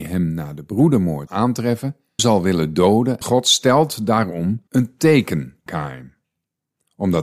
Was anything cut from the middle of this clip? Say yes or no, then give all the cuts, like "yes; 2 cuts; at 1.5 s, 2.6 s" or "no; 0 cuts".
yes; 5 cuts; at 1.3 s, 2.2 s, 3.2 s, 4.7 s, 5.7 s